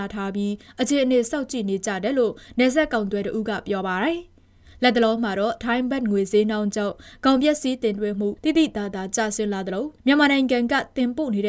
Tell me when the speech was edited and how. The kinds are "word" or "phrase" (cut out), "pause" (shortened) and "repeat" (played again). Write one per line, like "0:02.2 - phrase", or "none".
0:08.4 - pause